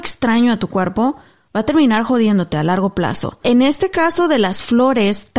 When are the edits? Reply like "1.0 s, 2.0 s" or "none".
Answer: none